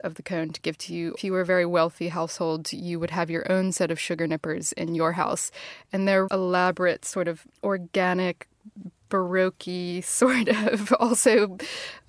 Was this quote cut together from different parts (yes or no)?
yes